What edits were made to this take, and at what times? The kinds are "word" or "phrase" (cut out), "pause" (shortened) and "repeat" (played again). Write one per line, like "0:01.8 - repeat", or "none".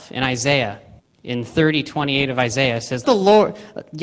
0:01.0 - pause
0:03.0 - word